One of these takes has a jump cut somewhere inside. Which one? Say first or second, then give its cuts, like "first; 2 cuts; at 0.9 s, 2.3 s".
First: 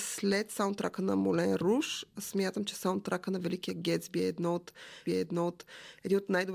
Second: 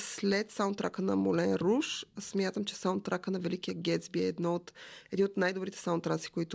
first; 1 cut; at 5.1 s